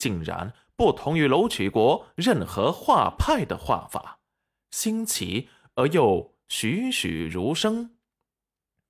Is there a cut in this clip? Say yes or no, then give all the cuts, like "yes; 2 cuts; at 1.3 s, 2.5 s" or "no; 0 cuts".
no; 0 cuts